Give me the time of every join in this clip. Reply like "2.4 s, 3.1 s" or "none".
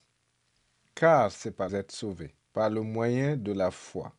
1.7 s, 2.4 s